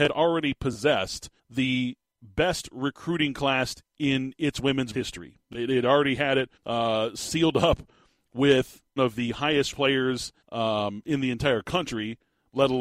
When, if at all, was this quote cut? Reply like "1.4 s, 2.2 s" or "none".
1.4 s, 4.9 s, 6.6 s, 9.0 s, 9.7 s, 10.4 s